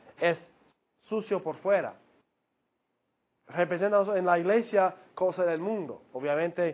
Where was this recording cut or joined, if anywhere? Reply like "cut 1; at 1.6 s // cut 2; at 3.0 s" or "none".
none